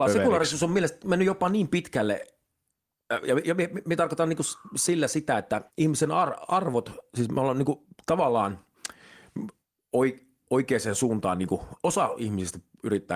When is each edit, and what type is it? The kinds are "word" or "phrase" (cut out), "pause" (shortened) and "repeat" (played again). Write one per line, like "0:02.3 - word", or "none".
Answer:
0:05.7 - pause
0:09.6 - pause